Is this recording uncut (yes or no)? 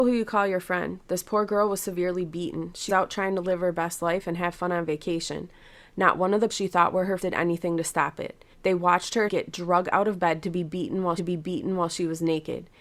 no